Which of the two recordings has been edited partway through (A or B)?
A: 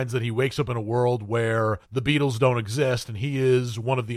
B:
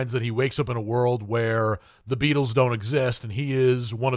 A